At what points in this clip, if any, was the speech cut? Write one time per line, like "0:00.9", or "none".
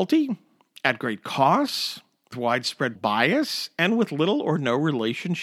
0:02.3
0:02.9